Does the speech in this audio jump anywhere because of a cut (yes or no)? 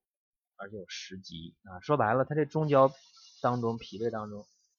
yes